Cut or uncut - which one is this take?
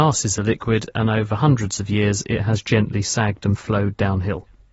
uncut